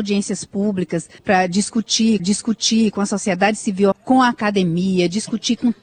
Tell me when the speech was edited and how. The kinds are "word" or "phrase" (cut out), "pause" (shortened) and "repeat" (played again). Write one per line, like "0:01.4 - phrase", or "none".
0:01.2 - pause
0:02.2 - repeat
0:03.9 - phrase